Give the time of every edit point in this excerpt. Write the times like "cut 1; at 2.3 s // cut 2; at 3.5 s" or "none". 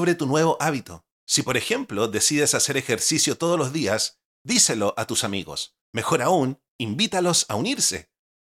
cut 1; at 1.2 s // cut 2; at 5.8 s